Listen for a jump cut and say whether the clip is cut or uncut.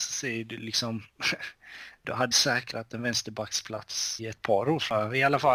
cut